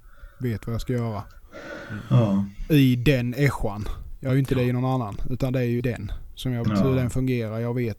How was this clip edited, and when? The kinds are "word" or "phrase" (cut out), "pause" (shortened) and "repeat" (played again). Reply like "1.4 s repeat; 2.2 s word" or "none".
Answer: 4.3 s word; 5.8 s word; 6.6 s word